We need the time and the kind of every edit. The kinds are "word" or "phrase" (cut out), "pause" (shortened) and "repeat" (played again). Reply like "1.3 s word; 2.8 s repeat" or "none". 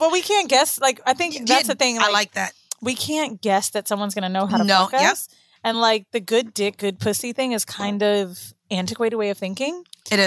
none

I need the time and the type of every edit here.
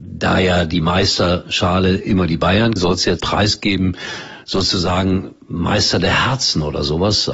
2.8 s word; 3.2 s word

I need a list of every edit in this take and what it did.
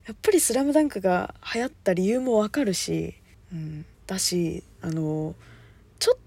3.3 s pause; 3.9 s pause

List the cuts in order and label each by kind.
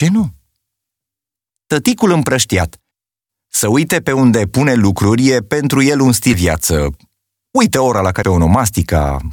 6.3 s word; 8.2 s word

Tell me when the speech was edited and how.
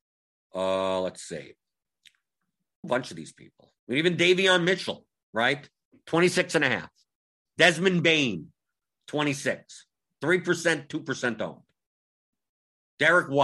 2.8 s phrase; 3.8 s pause

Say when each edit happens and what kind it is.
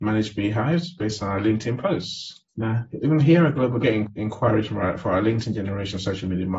2.5 s pause; 3.8 s phrase

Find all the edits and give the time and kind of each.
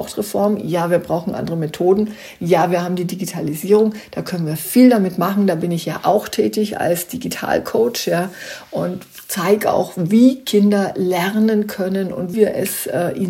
12.3 s word

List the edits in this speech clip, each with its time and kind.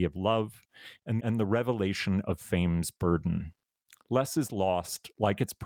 1.2 s phrase

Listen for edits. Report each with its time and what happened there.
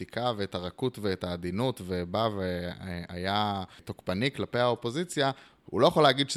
none

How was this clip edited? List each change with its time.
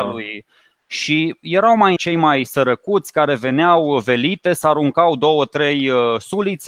2.0 s phrase

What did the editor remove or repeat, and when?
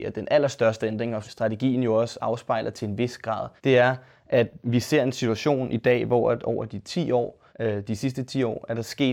1.2 s word; 3.6 s pause; 7.5 s pause

